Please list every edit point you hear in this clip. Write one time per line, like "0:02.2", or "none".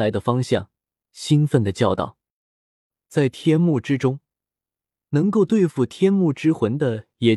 none